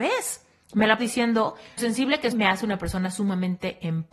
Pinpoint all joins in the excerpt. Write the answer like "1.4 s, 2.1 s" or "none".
1.0 s, 1.8 s, 2.3 s

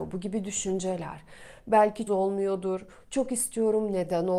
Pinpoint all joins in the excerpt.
2.1 s

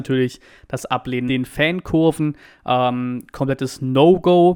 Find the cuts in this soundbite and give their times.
1.3 s

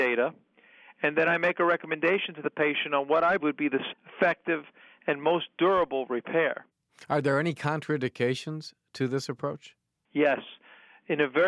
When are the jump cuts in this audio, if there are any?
3.4 s, 3.9 s

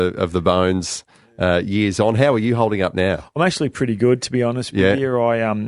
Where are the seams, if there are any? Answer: none

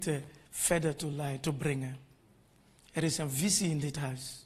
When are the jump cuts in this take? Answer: none

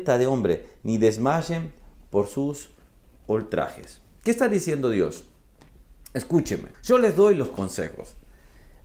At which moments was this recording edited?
6.7 s

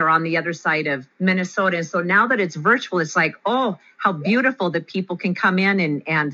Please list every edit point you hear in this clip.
1.1 s

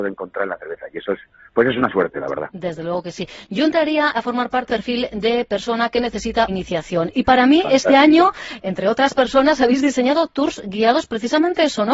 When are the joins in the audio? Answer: 4.1 s, 4.7 s, 6.5 s

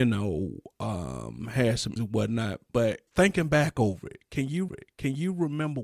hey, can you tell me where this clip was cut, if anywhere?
2.0 s, 3.1 s, 4.7 s

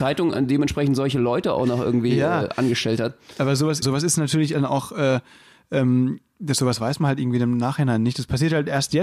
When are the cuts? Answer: 3.8 s

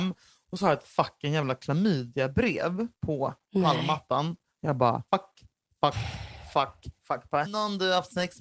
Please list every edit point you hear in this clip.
2.9 s, 5.1 s, 7.0 s, 7.4 s

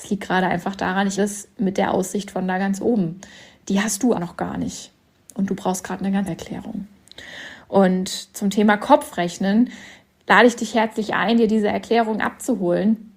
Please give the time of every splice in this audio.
1.2 s, 4.2 s, 6.3 s

